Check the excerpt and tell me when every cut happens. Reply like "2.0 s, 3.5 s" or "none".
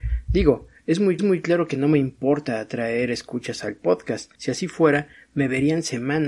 1.2 s, 4.3 s